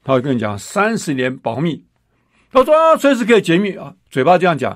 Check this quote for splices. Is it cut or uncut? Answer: uncut